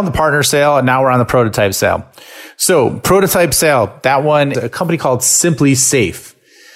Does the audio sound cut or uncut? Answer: cut